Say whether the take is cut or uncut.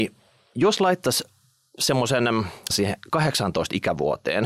cut